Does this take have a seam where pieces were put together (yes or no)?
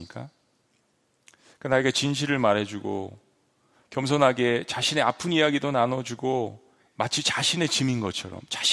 no